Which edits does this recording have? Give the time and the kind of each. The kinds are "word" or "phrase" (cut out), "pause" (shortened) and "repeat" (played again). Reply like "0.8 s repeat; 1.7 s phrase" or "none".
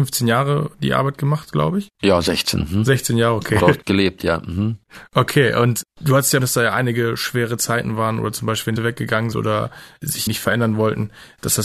3.6 s word; 6.4 s word; 8.8 s word; 9.3 s word; 10.3 s word